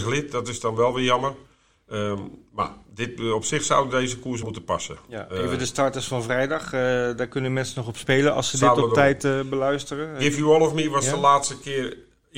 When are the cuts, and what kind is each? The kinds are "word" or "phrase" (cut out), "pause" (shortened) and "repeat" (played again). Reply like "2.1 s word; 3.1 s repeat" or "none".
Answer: 4.4 s word

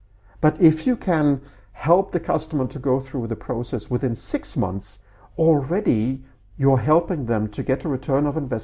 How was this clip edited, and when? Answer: none

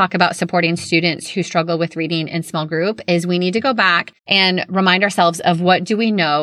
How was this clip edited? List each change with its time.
4.2 s pause

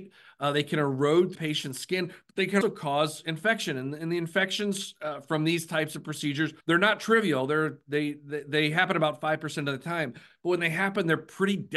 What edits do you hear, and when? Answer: 1.3 s phrase; 2.6 s word; 6.6 s pause

